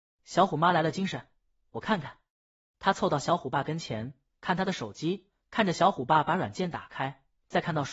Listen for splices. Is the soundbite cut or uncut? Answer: uncut